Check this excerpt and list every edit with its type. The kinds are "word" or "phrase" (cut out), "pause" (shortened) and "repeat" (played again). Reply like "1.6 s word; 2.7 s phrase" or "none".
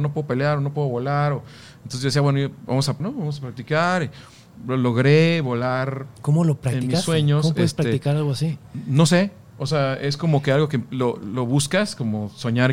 3.0 s word